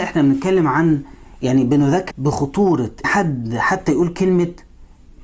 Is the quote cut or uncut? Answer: cut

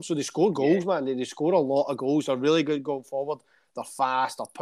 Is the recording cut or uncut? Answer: uncut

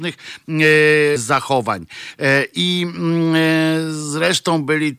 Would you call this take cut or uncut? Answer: cut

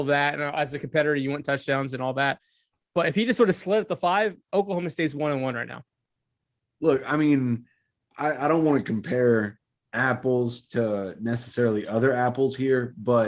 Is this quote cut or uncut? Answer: uncut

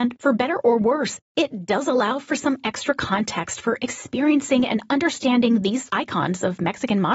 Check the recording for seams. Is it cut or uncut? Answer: cut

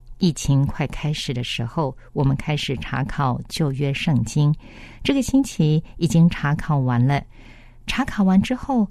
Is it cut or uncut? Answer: uncut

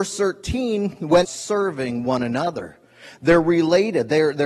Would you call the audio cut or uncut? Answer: cut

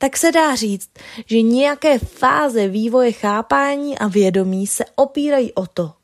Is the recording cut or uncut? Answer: uncut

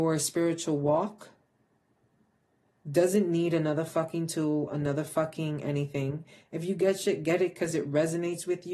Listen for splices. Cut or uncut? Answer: uncut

